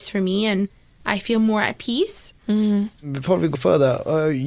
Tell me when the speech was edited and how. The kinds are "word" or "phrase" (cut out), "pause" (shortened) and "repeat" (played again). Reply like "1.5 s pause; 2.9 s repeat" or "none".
2.4 s pause; 3.5 s word